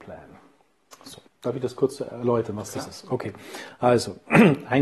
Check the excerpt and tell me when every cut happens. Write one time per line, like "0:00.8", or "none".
0:01.3

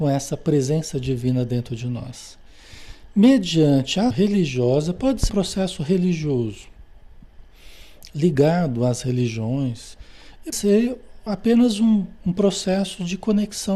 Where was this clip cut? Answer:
0:04.1
0:05.3
0:10.5
0:11.3

